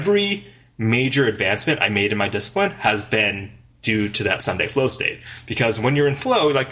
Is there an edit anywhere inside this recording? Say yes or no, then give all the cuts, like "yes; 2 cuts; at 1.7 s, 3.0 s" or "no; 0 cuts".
no; 0 cuts